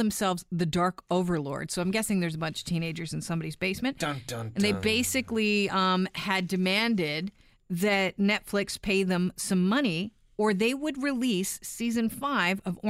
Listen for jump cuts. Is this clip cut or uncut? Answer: uncut